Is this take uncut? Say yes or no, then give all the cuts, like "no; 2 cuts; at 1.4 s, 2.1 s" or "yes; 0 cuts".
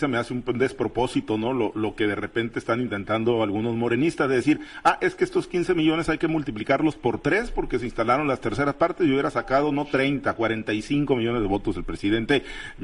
yes; 0 cuts